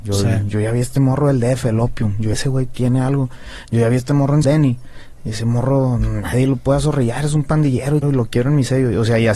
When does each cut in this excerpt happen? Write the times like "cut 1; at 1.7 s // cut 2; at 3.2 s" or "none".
cut 1; at 2.3 s // cut 2; at 4.4 s // cut 3; at 8.0 s